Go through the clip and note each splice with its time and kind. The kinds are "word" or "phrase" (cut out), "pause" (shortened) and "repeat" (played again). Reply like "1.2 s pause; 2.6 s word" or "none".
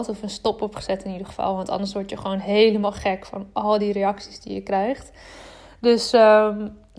none